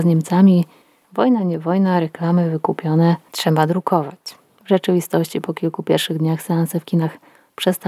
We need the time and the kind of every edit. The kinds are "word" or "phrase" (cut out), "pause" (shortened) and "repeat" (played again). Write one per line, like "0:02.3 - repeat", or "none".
none